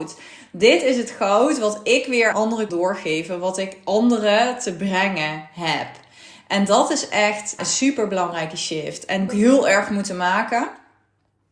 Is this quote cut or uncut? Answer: cut